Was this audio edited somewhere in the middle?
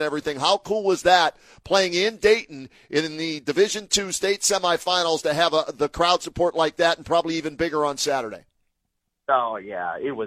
no; 0 cuts

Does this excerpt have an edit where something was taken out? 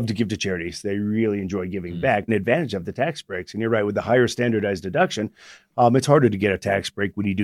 yes; 1 cut; at 2.3 s

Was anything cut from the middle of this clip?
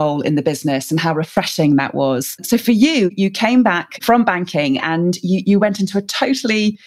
no; 0 cuts

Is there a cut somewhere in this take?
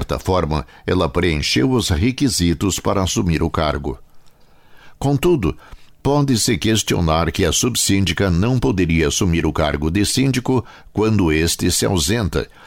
no; 0 cuts

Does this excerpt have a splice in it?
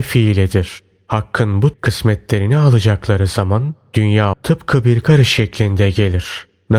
yes; 3 cuts; at 1.7 s, 4.3 s, 5.0 s

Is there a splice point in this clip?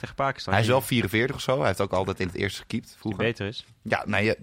no; 0 cuts

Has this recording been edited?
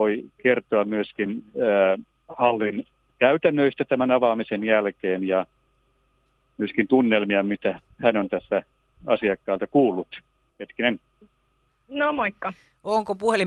no; 0 cuts

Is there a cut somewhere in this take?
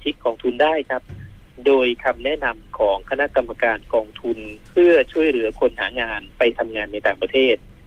yes; 2 cuts; at 4.7 s, 6.3 s

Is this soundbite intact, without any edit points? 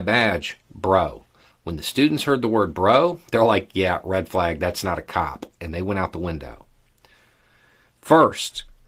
yes; 0 cuts

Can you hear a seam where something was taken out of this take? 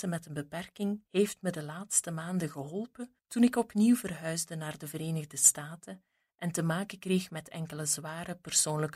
yes; 2 cuts; at 1.1 s, 3.2 s

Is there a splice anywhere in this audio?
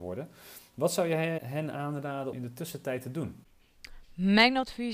yes; 1 cut; at 2.3 s

